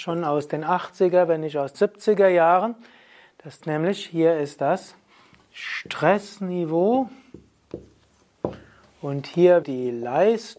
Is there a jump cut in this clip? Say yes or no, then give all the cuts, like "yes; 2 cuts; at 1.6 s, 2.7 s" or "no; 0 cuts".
yes; 3 cuts; at 1.7 s, 3.6 s, 9.6 s